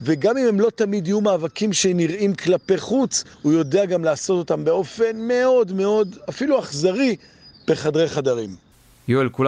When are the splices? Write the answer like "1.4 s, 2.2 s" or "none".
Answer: 3.3 s